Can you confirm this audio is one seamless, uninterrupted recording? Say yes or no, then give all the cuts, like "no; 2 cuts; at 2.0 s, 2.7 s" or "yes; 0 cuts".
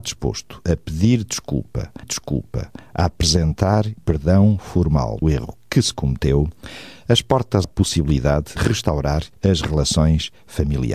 no; 6 cuts; at 2.0 s, 4.0 s, 5.2 s, 7.6 s, 8.6 s, 9.3 s